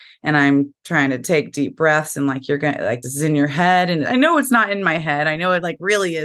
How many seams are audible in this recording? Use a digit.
1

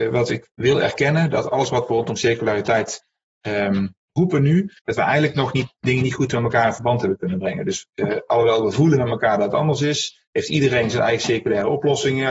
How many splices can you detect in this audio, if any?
1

